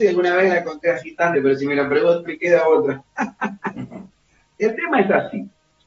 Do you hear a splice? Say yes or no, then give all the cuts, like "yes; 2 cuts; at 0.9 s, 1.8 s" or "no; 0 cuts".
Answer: yes; 2 cuts; at 1.3 s, 2.2 s